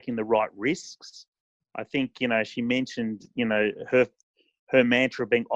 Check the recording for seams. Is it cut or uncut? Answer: uncut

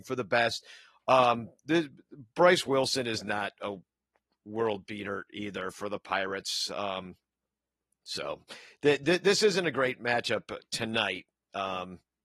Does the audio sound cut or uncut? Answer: uncut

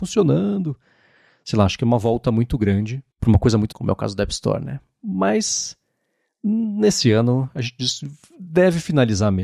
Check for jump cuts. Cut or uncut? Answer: cut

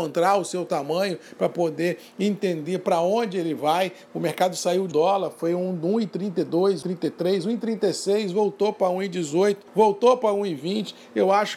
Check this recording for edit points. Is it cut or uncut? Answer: cut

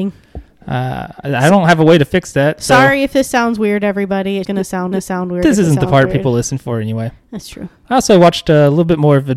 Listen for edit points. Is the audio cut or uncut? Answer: cut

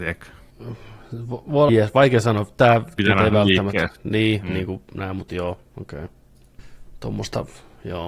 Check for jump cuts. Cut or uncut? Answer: cut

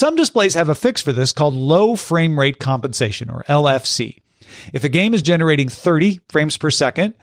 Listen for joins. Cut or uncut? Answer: uncut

